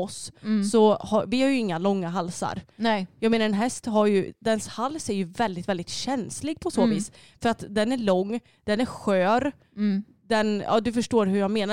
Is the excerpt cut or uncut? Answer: uncut